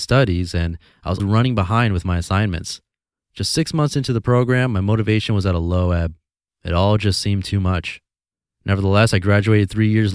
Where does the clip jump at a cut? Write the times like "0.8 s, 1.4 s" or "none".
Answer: 1.2 s